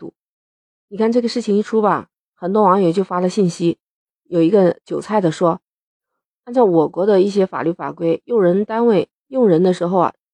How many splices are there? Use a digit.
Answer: 0